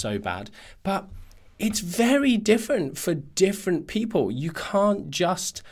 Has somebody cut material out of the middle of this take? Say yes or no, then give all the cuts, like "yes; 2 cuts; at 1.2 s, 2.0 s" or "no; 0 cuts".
no; 0 cuts